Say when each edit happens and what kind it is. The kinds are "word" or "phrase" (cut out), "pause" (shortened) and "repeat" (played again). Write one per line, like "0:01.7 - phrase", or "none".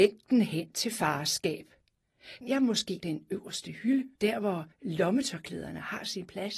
0:02.4 - word
0:03.0 - word
0:04.2 - pause
0:04.7 - pause

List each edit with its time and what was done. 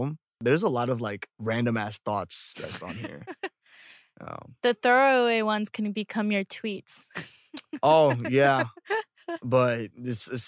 0:01.3 - pause

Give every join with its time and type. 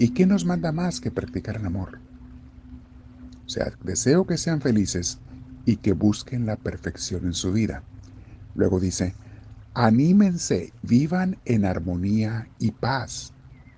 0:10.8 - word

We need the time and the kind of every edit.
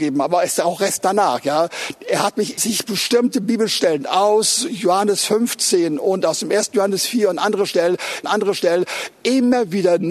0:02.6 - phrase
0:08.2 - repeat

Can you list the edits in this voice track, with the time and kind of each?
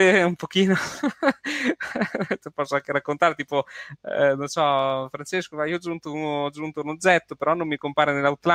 none

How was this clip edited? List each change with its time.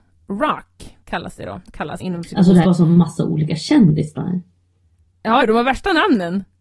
0:01.0 - pause
0:02.0 - word
0:02.6 - phrase
0:05.4 - word

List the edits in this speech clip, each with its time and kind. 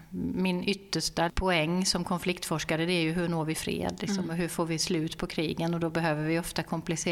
none

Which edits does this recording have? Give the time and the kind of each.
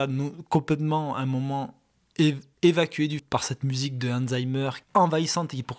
0:03.2 - word
0:04.8 - word

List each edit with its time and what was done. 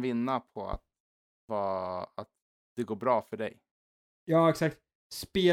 none

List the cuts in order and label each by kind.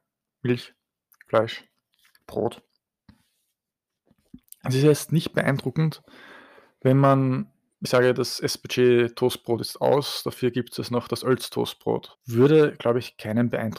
0:07.8 - word
0:12.1 - pause

